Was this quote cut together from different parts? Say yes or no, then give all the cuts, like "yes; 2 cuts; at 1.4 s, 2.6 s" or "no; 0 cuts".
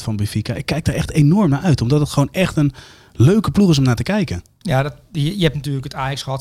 no; 0 cuts